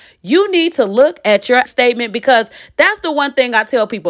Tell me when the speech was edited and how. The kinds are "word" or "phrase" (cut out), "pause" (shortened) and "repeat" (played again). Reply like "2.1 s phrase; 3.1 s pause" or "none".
1.7 s phrase